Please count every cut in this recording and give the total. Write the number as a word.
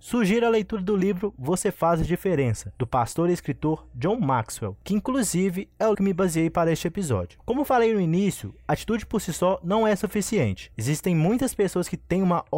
one